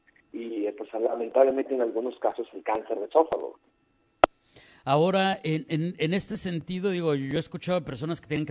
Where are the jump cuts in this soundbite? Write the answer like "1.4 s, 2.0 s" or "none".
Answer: none